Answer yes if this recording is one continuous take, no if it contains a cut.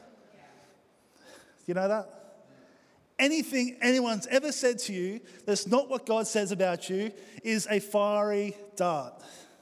yes